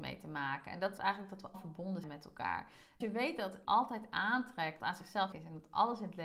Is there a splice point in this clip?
yes; 7 cuts; at 1.0 s, 1.5 s, 2.0 s, 3.0 s, 3.6 s, 4.8 s, 5.3 s

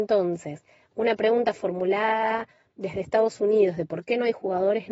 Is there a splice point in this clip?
no; 0 cuts

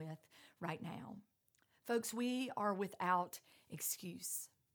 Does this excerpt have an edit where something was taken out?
yes; 1 cut; at 1.4 s

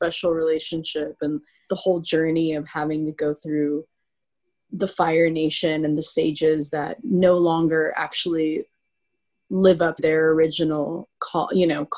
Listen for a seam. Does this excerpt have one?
yes; 2 cuts; at 1.7 s, 10.0 s

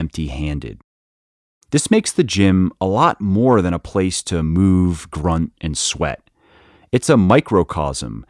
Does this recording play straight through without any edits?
yes; 0 cuts

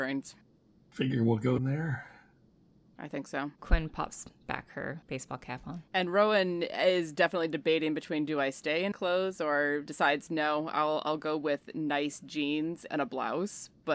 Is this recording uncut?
no; 5 cuts; at 1.6 s, 3.6 s, 5.9 s, 8.9 s, 9.9 s

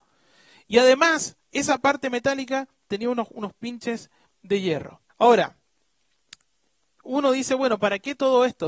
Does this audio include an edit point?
yes; 2 cuts; at 1.4 s, 5.1 s

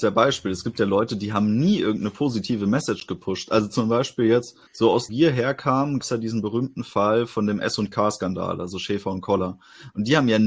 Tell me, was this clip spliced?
yes; 3 cuts; at 4.7 s, 5.1 s, 6.0 s

